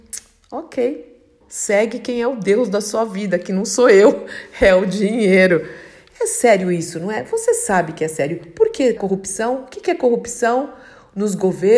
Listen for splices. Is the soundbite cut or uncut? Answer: cut